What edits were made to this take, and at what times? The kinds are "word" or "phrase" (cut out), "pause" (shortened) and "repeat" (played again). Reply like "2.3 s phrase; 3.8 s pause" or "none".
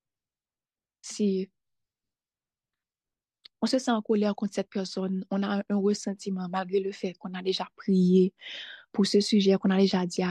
1.1 s word